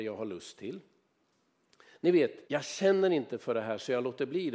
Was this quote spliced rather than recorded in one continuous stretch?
yes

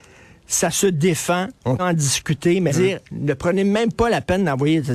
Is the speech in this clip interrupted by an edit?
yes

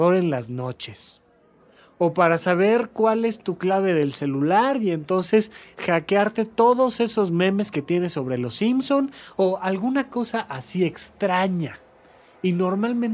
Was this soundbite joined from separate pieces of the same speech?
no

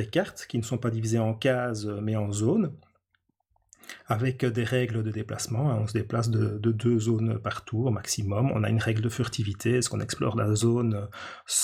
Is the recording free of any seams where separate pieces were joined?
yes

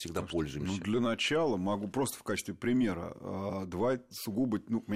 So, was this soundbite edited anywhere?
no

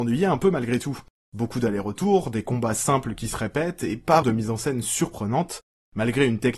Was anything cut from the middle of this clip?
yes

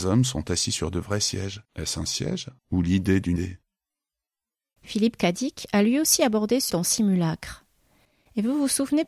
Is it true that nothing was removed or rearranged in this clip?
no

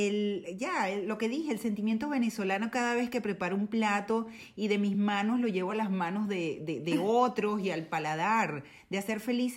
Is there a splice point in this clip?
no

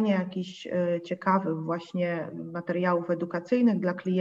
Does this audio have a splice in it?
no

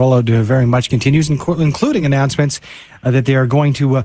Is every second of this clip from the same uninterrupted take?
yes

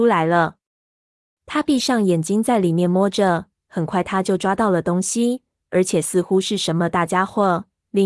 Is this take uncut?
yes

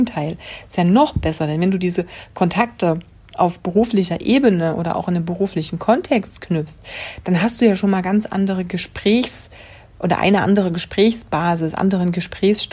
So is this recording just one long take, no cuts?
yes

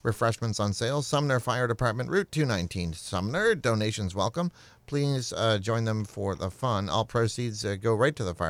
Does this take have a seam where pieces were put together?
no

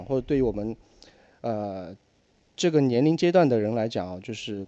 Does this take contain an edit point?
no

